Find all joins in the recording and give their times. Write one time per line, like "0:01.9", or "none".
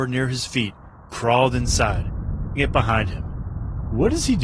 0:01.1
0:02.6